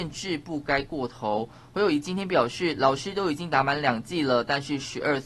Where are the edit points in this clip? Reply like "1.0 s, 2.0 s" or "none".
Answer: none

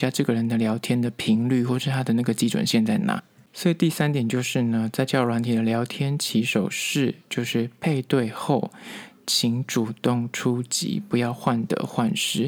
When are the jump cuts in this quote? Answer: none

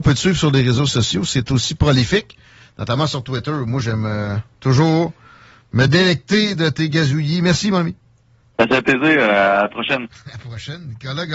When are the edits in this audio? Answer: none

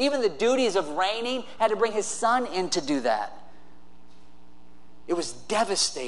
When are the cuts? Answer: none

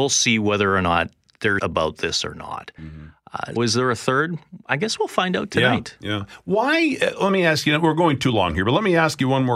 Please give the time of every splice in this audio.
1.6 s, 3.6 s

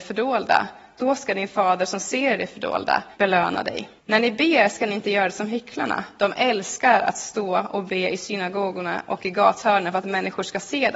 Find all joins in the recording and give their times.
3.1 s, 4.0 s

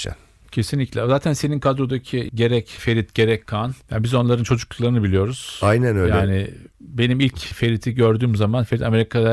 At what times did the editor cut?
3.8 s

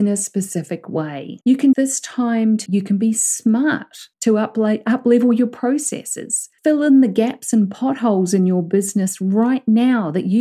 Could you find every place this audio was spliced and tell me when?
1.4 s, 1.7 s, 2.7 s, 4.1 s, 6.6 s

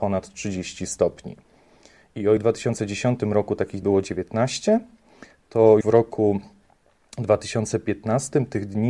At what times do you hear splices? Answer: 2.4 s, 3.8 s, 5.8 s

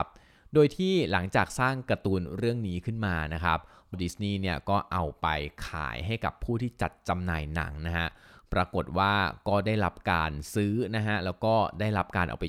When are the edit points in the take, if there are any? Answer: 3.9 s

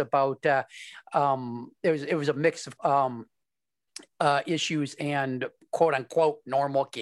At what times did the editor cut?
2.8 s

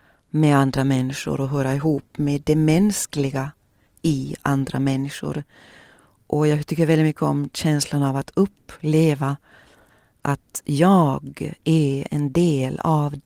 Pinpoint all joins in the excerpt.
none

